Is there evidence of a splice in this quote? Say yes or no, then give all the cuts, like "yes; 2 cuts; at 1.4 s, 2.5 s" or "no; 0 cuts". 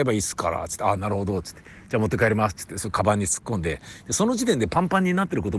no; 0 cuts